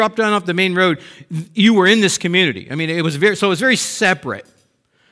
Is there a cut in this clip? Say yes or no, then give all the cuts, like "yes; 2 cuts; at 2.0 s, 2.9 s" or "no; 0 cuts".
no; 0 cuts